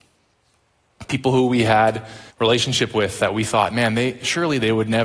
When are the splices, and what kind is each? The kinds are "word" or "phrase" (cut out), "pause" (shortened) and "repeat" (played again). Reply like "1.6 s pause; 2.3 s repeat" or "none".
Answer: 2.3 s pause